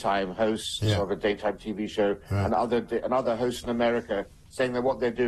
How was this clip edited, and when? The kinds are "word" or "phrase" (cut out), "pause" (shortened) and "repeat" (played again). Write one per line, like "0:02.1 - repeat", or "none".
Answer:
none